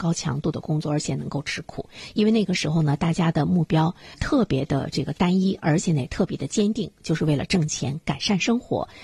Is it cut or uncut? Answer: cut